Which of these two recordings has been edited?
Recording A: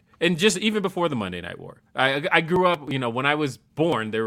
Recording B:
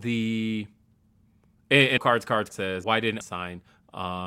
B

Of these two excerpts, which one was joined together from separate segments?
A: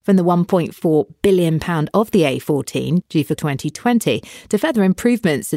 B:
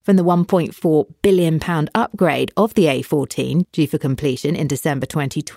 A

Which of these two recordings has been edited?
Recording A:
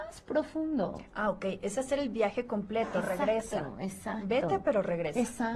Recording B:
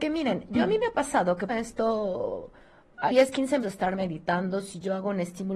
B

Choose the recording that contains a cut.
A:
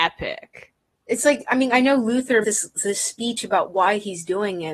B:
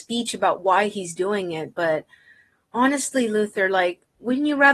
A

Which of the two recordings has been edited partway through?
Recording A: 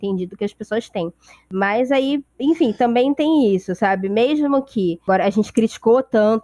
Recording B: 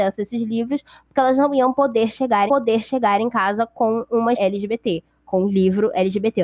B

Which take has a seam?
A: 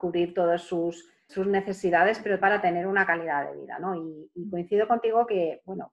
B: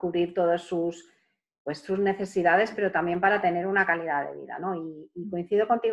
A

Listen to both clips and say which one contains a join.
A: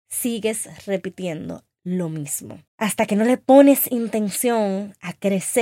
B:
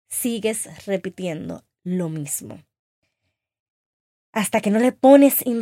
A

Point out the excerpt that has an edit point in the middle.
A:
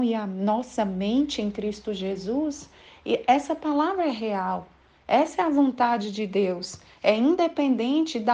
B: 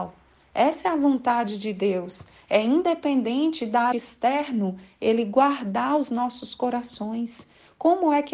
B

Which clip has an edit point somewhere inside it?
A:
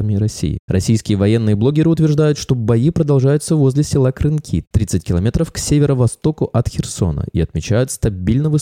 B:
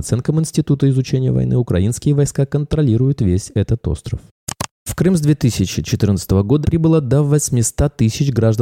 B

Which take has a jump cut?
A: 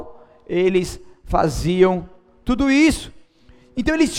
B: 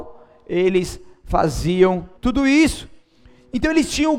B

